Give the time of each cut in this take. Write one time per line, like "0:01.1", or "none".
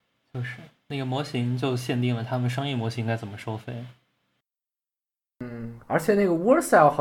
0:05.8